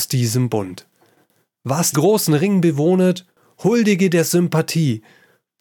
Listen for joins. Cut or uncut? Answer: cut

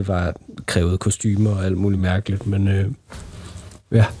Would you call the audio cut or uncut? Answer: uncut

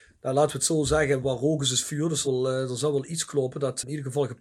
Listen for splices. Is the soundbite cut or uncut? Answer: cut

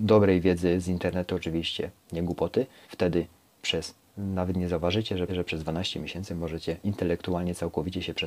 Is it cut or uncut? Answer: cut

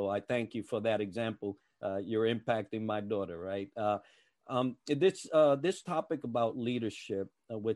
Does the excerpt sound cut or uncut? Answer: uncut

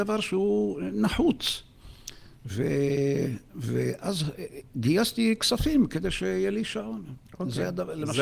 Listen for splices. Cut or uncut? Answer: uncut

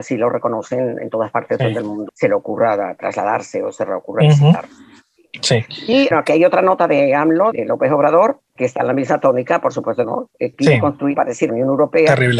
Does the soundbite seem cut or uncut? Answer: cut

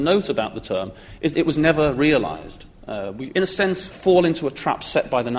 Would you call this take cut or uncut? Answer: cut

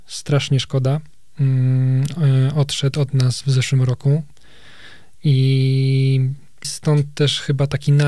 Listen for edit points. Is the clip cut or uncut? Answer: cut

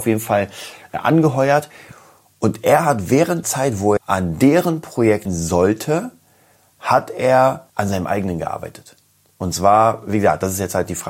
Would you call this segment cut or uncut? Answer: cut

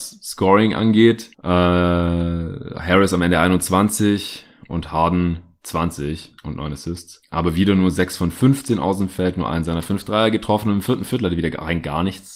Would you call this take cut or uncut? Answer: cut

